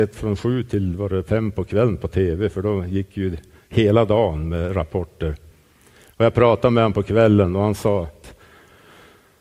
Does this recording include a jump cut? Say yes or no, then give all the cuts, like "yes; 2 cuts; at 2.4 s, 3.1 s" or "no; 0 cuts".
no; 0 cuts